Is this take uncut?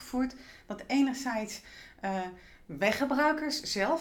yes; 0 cuts

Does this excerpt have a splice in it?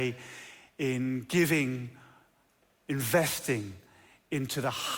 no; 0 cuts

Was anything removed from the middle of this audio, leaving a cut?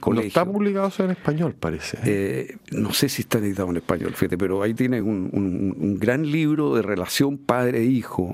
no; 0 cuts

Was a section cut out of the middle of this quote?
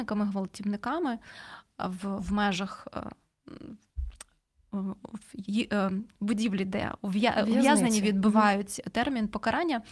yes; 1 cut; at 2.2 s

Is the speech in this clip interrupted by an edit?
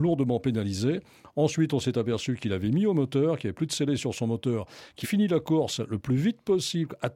yes; 1 cut; at 5.0 s

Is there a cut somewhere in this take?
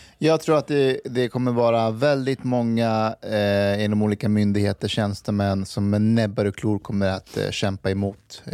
no; 0 cuts

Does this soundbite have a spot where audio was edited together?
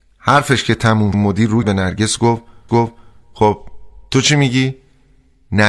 yes; 3 cuts; at 1.1 s, 1.6 s, 2.7 s

